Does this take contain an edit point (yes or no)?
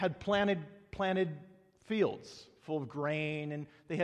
no